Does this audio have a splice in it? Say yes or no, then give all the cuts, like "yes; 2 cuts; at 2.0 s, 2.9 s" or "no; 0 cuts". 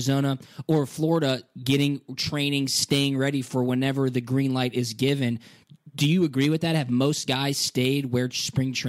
no; 0 cuts